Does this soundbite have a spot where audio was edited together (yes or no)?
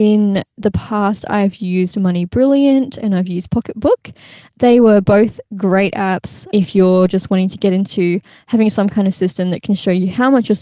no